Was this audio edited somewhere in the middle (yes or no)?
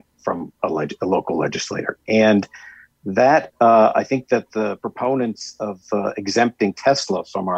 no